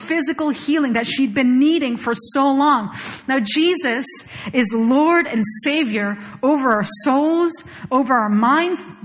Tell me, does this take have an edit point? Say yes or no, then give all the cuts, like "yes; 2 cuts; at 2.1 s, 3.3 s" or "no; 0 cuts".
no; 0 cuts